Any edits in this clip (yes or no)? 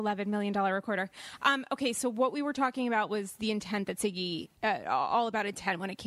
yes